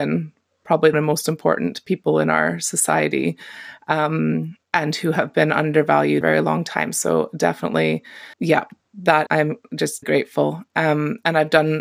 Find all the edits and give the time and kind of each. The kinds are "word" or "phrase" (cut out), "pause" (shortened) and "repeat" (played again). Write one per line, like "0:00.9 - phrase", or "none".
0:00.9 - word
0:04.6 - pause
0:06.2 - phrase
0:08.3 - pause
0:09.3 - word
0:10.0 - word